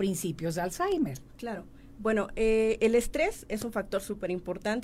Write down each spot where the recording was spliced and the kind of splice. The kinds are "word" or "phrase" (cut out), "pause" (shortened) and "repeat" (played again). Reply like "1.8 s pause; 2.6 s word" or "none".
none